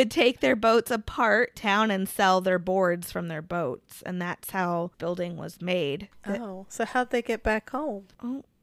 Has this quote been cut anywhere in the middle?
yes; 2 cuts; at 1.6 s, 4.9 s

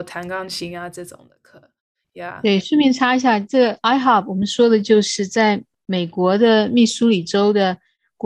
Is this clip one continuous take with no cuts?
yes; 0 cuts

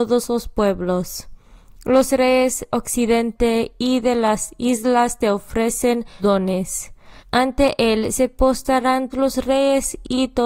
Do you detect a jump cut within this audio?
yes; 4 cuts; at 2.7 s, 6.2 s, 7.2 s, 9.1 s

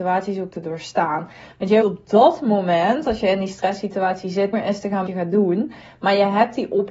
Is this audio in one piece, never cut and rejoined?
no; 3 cuts; at 1.8 s, 4.5 s, 5.1 s

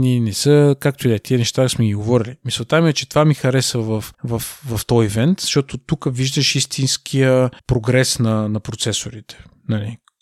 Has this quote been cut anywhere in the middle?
yes; 2 cuts; at 4.1 s, 7.6 s

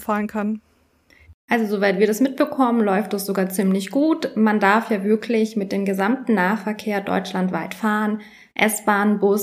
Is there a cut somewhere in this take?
no; 0 cuts

